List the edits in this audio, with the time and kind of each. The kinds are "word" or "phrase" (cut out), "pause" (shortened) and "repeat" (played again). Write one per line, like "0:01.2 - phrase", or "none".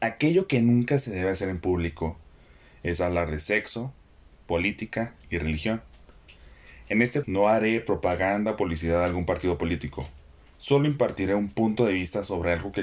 0:05.2 - pause
0:07.2 - word